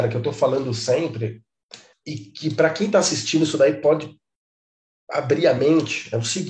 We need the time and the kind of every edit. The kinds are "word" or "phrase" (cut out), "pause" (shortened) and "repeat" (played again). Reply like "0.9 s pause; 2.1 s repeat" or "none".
1.9 s word